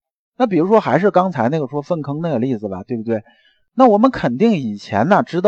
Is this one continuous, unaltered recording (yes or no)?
yes